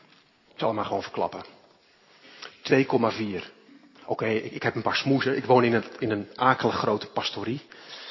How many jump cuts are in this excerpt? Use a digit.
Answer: 1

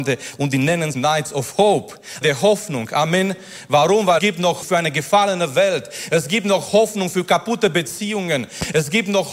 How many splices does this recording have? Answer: 4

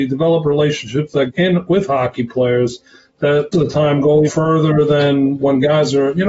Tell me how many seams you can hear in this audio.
3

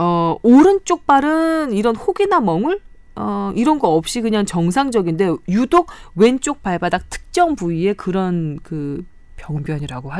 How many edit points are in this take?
0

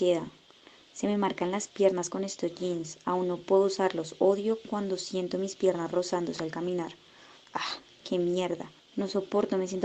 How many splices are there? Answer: 1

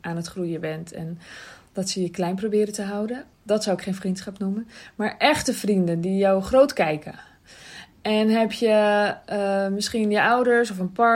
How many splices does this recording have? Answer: 1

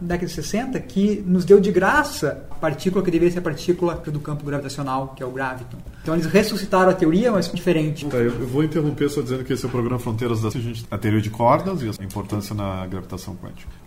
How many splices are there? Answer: 6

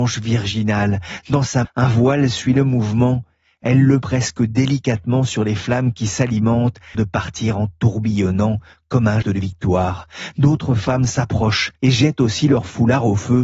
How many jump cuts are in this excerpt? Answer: 5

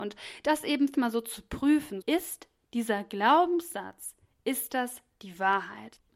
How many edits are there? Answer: 2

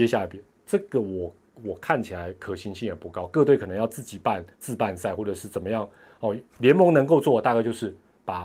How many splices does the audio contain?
1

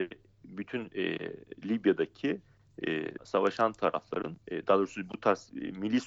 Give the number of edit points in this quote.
2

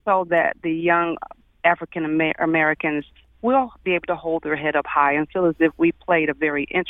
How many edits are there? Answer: 0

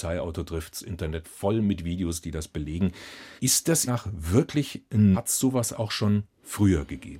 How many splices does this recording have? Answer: 4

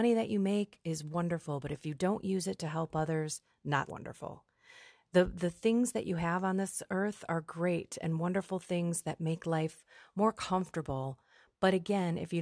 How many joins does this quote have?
1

